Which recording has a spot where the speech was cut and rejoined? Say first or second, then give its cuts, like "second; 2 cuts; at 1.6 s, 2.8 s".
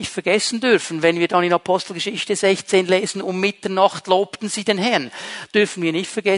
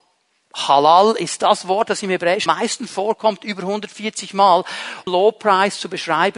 second; 2 cuts; at 2.5 s, 5.1 s